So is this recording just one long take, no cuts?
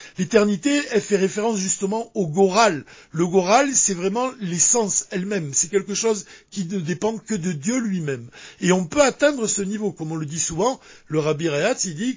yes; 0 cuts

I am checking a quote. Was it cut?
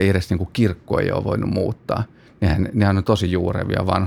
no; 0 cuts

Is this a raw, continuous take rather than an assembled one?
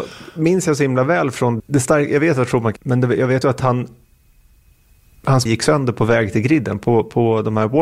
no; 4 cuts; at 1.6 s, 2.8 s, 3.4 s, 5.5 s

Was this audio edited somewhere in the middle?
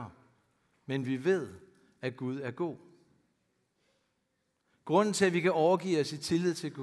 no; 0 cuts

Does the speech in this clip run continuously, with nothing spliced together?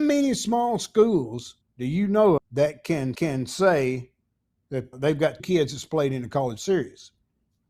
no; 6 cuts; at 1.6 s, 2.4 s, 3.1 s, 4.9 s, 5.4 s, 6.6 s

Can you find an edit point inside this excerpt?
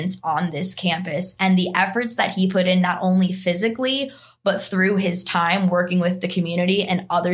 no; 0 cuts

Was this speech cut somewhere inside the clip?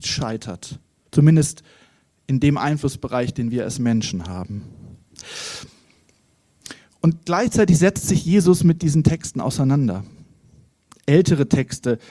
no; 0 cuts

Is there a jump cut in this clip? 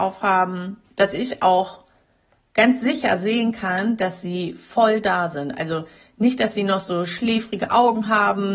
no; 0 cuts

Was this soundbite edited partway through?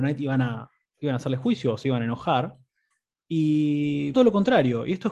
yes; 1 cut; at 4.1 s

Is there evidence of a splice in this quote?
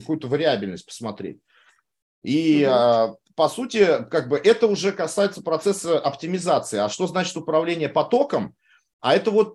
no; 0 cuts

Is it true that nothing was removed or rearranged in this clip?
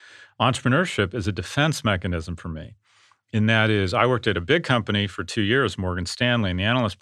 yes; 0 cuts

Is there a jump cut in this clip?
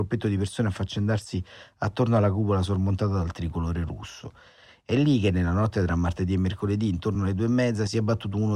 no; 0 cuts

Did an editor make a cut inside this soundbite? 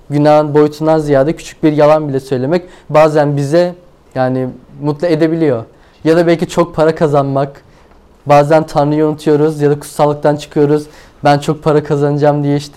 no; 0 cuts

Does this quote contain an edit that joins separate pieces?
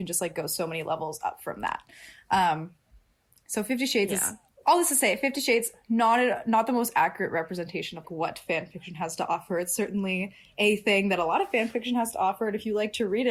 yes; 1 cut; at 8.0 s

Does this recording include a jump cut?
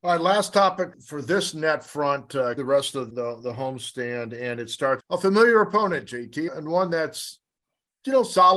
yes; 5 cuts; at 0.9 s, 2.6 s, 3.1 s, 5.0 s, 6.5 s

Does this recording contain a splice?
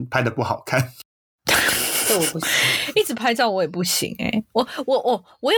no; 0 cuts

